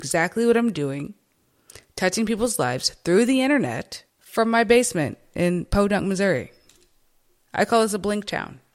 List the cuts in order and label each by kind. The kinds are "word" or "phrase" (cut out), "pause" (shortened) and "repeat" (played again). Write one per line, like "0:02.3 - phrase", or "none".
0:04.1 - pause

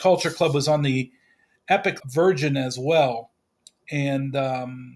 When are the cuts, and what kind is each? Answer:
0:02.0 - phrase

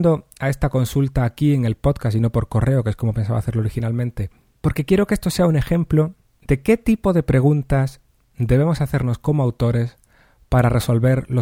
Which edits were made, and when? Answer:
none

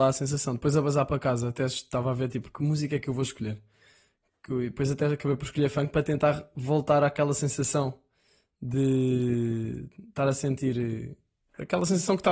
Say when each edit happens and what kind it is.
none

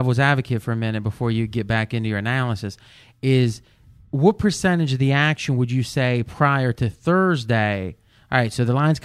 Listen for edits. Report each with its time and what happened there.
none

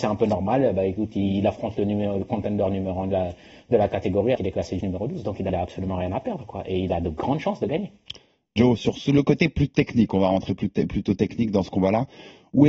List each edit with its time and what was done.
0:04.4 - word
0:04.8 - word
0:05.5 - phrase

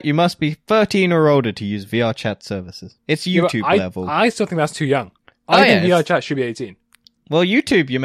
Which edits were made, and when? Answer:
none

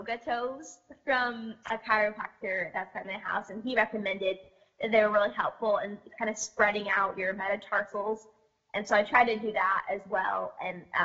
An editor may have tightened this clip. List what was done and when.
0:01.6 - word
0:03.0 - word

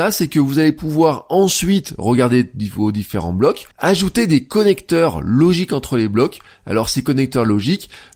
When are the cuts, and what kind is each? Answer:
0:03.7 - pause

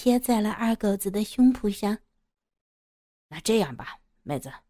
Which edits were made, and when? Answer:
none

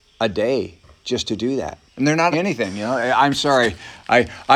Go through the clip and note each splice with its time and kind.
0:01.9 - pause
0:02.3 - word

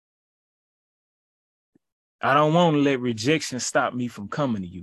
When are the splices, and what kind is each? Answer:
none

